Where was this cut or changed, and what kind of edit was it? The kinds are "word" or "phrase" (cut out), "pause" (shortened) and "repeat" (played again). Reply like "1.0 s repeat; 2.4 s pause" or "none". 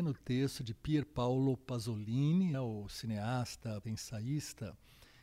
2.5 s word; 3.8 s word

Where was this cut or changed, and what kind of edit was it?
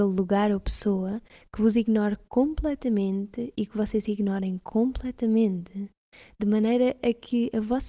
none

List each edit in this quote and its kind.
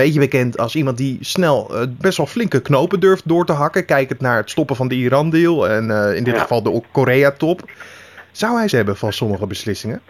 2.0 s word; 8.7 s word

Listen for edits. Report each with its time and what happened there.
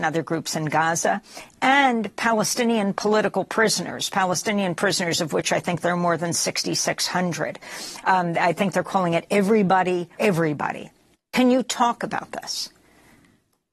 10.2 s word; 11.1 s pause

